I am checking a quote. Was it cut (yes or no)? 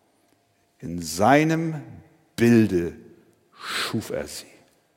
no